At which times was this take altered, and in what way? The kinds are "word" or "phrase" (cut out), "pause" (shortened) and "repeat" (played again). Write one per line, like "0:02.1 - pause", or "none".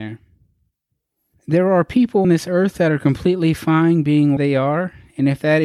0:02.2 - word
0:04.4 - word